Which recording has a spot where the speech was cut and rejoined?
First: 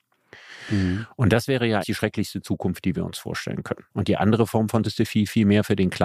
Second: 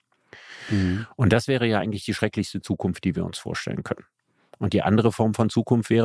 first; 3 cuts; at 1.8 s, 3.9 s, 4.8 s

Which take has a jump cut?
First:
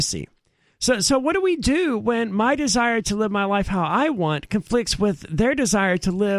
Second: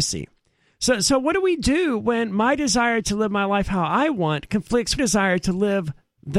second; 1 cut; at 5.0 s

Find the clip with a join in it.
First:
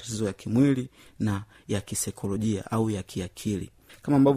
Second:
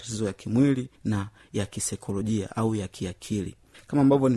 second; 1 cut; at 0.9 s

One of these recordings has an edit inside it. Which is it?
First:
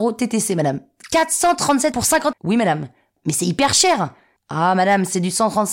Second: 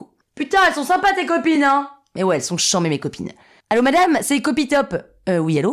first; 2 cuts; at 1.9 s, 2.3 s

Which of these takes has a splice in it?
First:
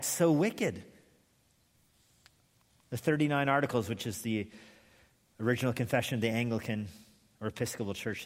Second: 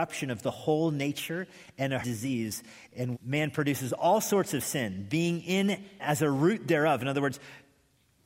second; 3 cuts; at 2.0 s, 3.1 s, 6.0 s

